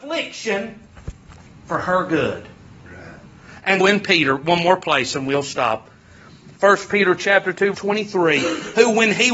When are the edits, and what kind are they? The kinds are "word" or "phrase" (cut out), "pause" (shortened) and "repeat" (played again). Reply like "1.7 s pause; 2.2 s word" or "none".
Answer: 3.8 s word; 7.7 s word